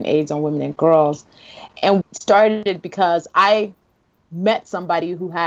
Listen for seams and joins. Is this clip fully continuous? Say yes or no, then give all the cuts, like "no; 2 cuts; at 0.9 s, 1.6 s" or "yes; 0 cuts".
no; 1 cut; at 2.0 s